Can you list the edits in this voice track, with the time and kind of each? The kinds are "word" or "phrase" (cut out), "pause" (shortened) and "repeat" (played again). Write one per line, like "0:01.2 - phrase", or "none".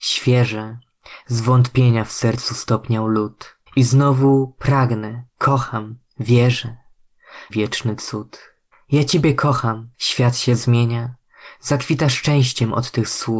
0:03.7 - pause
0:05.3 - pause
0:07.5 - phrase
0:08.7 - pause
0:09.9 - pause